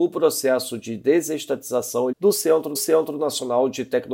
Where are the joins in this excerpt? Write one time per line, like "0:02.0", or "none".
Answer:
0:02.1
0:02.8